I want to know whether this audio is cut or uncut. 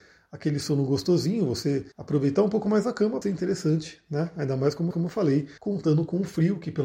cut